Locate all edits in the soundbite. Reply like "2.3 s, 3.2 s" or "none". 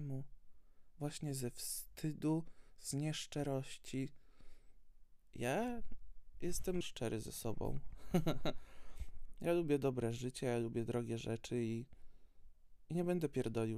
6.8 s